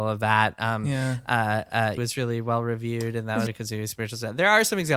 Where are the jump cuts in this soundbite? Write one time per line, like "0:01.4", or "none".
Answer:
0:02.0
0:03.5